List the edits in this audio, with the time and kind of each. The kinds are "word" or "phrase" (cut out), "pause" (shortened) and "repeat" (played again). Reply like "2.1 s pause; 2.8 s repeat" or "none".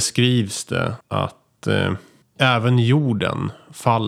1.0 s pause; 2.2 s pause